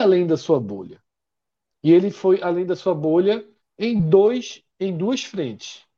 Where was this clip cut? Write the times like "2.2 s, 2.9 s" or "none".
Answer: 3.6 s